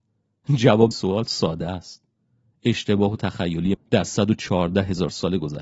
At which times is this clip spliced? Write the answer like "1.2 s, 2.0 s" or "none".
0.9 s, 3.2 s, 3.7 s, 4.1 s

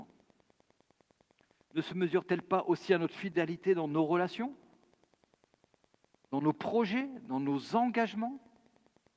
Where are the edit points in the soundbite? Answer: none

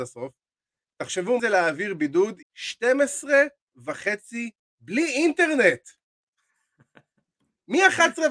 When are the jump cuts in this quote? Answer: 1.4 s, 2.4 s, 4.6 s

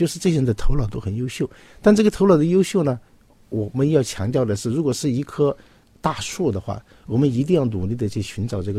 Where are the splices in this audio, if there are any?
5.8 s

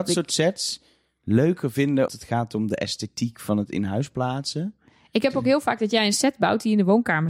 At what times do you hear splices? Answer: 2.1 s

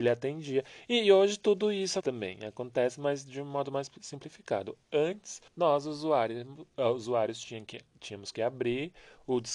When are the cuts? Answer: 2.0 s, 5.5 s

